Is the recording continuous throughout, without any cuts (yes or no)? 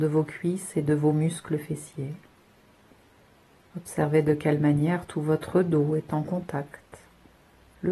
yes